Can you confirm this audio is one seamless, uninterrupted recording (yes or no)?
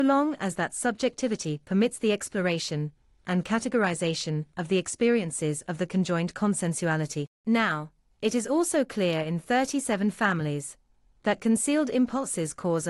no